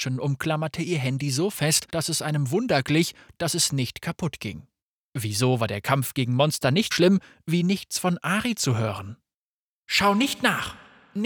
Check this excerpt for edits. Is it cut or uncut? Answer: cut